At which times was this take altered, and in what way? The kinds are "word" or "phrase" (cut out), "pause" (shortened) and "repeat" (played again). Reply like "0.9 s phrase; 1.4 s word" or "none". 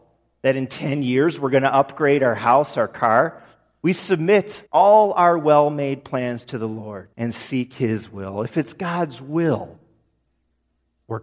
4.7 s pause; 7.1 s pause